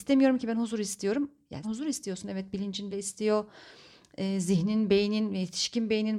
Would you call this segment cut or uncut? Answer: cut